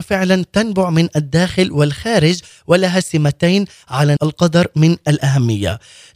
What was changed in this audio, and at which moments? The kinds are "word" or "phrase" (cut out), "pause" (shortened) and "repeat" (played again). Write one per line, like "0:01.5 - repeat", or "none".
0:04.2 - word